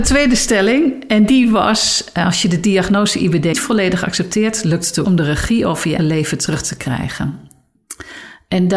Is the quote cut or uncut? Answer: cut